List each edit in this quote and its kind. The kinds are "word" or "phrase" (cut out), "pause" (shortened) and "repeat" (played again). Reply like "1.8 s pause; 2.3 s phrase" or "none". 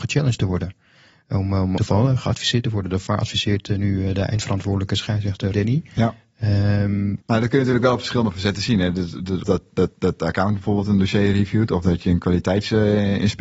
1.8 s word; 5.5 s word; 7.2 s pause; 9.4 s word; 9.9 s repeat